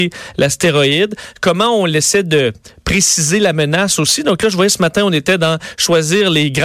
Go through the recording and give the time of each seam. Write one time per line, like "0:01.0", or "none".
none

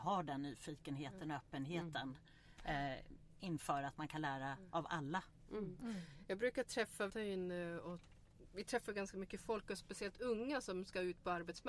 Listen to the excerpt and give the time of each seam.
0:07.1

